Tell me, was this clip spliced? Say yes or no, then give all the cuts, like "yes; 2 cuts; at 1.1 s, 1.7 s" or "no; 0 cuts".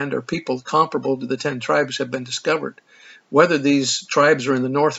no; 0 cuts